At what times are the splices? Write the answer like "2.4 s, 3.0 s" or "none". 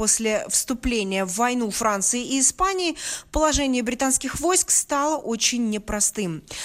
none